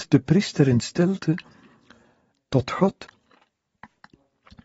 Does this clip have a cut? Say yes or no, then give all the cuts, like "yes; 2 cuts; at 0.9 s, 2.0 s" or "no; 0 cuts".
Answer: no; 0 cuts